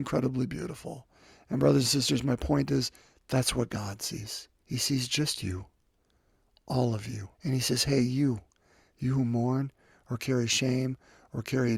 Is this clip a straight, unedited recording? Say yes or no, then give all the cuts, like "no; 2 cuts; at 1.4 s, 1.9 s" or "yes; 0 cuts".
no; 2 cuts; at 4.6 s, 7.3 s